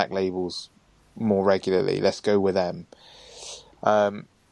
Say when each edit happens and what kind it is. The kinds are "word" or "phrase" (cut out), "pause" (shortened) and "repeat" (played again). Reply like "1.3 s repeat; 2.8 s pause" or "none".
none